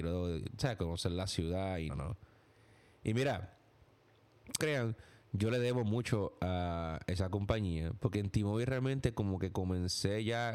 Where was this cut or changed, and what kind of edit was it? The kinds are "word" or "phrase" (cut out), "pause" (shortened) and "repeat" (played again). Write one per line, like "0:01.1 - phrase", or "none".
0:01.9 - word
0:04.6 - phrase